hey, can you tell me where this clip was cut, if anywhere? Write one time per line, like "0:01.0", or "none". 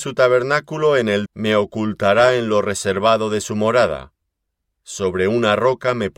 0:01.3